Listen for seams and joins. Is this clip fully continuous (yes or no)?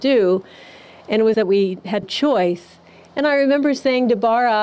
no